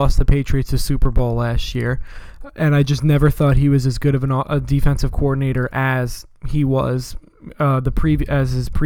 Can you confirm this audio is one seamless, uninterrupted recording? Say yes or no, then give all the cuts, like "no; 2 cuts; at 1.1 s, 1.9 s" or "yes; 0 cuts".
yes; 0 cuts